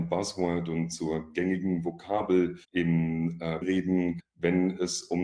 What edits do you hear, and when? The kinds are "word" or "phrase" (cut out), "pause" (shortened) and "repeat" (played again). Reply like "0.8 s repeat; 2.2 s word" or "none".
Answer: 2.6 s pause; 3.6 s word; 4.2 s word